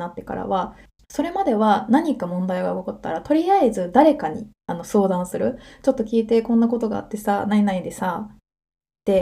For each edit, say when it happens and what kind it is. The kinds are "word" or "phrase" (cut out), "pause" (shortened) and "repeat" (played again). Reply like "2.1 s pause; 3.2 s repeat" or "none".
4.6 s pause